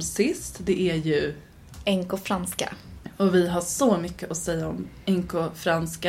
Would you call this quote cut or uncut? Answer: uncut